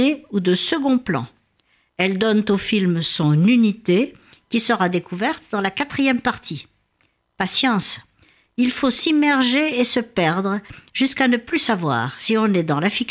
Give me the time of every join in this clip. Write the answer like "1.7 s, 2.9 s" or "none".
none